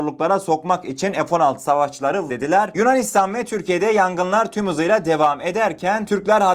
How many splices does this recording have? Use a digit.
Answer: 1